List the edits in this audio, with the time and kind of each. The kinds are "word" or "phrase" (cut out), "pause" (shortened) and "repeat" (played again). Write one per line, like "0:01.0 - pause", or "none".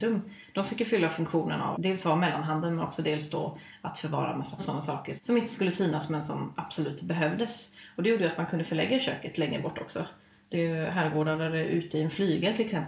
0:01.7 - word
0:04.6 - word
0:05.2 - word
0:10.5 - word